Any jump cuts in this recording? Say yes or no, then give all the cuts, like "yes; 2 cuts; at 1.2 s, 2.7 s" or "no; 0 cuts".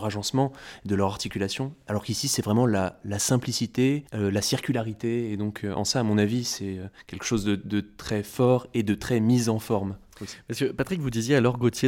yes; 1 cut; at 4.1 s